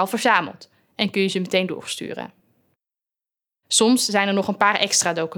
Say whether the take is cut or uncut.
uncut